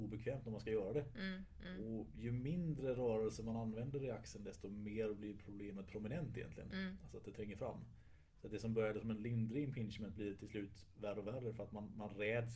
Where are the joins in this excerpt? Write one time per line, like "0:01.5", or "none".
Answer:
none